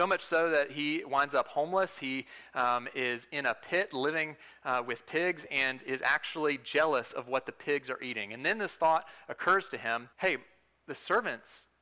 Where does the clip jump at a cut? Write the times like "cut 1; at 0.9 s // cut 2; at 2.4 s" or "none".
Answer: cut 1; at 10.1 s